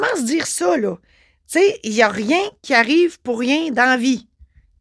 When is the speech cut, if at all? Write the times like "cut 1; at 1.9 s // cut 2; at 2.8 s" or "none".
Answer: none